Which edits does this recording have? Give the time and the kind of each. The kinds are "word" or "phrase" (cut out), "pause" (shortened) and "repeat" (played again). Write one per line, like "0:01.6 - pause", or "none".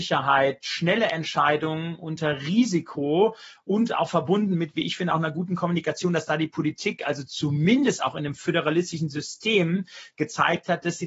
none